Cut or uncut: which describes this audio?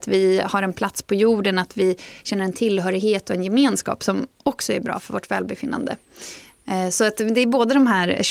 uncut